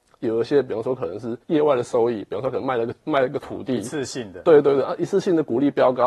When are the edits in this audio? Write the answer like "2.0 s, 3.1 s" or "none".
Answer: 1.4 s